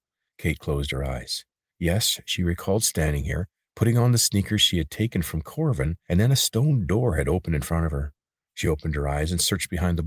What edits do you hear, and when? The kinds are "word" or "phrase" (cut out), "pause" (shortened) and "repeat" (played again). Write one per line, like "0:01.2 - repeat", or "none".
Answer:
none